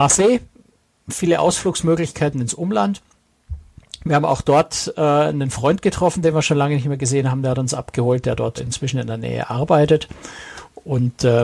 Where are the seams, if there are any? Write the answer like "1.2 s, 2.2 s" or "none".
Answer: 8.6 s